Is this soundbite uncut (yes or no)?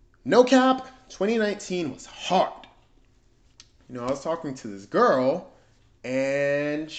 yes